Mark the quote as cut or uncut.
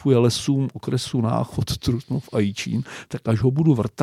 uncut